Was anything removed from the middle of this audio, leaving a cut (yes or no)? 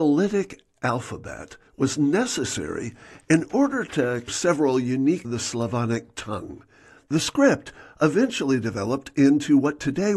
yes